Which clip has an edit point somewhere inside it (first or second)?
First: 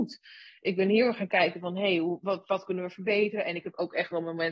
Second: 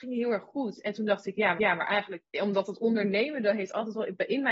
second